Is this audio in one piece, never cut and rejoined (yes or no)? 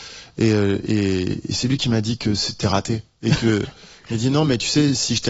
yes